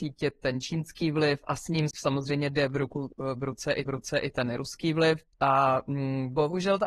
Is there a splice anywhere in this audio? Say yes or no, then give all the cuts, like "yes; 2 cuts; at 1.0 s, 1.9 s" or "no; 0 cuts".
yes; 3 cuts; at 1.9 s, 3.9 s, 5.3 s